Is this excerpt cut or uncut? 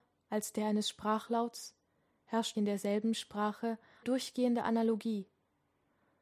cut